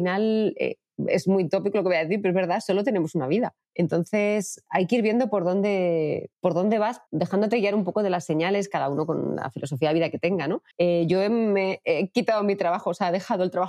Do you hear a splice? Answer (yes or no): yes